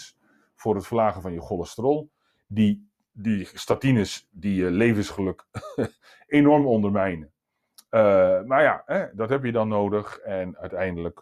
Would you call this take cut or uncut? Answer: uncut